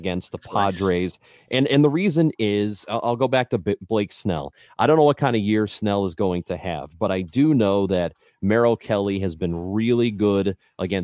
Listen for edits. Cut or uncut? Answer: uncut